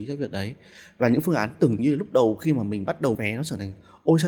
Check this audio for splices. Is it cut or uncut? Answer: cut